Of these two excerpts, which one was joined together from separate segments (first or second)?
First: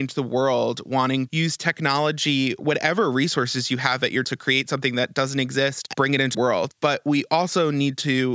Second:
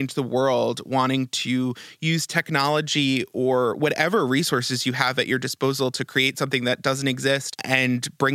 first